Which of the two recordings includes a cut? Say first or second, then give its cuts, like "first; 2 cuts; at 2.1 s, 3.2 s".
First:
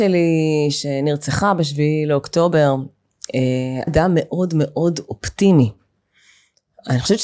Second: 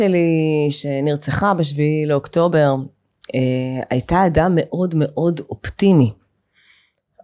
first; 1 cut; at 3.9 s